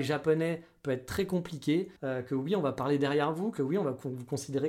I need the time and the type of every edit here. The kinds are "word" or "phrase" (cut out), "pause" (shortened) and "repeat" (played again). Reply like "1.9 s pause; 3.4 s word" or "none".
2.0 s pause